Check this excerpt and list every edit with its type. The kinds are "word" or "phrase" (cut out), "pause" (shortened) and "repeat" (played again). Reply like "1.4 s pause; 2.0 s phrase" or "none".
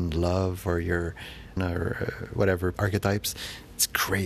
1.6 s word; 2.7 s word